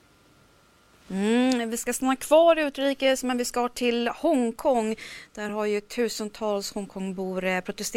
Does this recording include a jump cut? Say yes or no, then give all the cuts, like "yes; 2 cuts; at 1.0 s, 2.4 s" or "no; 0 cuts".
no; 0 cuts